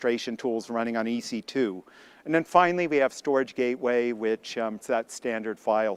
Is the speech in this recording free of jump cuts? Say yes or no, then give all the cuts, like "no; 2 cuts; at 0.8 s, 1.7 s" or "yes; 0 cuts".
no; 1 cut; at 4.8 s